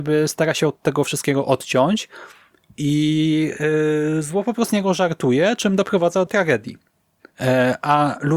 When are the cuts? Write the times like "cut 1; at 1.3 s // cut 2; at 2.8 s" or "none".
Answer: cut 1; at 4.7 s // cut 2; at 6.3 s